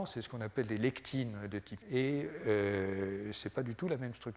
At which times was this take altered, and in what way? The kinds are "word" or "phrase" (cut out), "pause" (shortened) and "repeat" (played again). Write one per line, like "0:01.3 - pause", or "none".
0:01.8 - word
0:02.4 - word